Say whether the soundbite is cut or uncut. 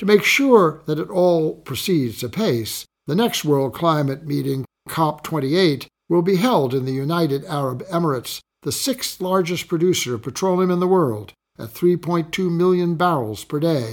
uncut